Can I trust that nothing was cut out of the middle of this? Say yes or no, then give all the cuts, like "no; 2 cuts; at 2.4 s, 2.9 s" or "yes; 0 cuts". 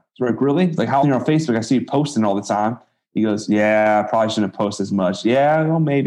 no; 1 cut; at 1.0 s